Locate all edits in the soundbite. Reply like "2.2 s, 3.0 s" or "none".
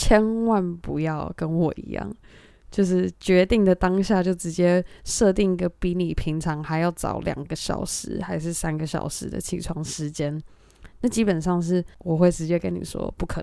none